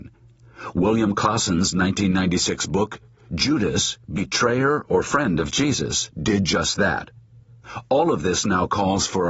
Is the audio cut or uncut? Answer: cut